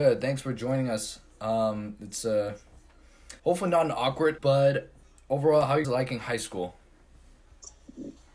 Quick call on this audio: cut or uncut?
cut